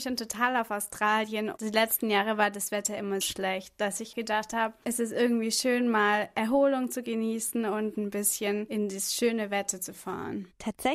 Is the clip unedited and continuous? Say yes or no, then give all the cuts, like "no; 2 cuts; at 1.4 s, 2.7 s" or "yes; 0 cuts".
no; 2 cuts; at 3.2 s, 4.1 s